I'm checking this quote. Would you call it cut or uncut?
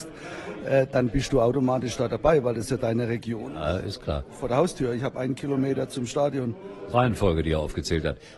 cut